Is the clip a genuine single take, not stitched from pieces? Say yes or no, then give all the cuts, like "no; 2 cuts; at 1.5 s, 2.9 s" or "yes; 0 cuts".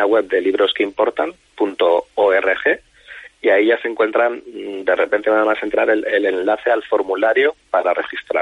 yes; 0 cuts